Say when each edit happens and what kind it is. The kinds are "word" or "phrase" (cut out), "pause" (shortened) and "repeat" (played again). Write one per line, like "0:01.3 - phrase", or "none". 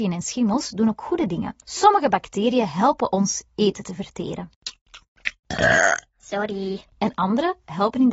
0:01.6 - pause